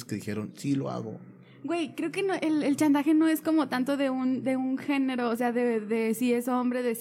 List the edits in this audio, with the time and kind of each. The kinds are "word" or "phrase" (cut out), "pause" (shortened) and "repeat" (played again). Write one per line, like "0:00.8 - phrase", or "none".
none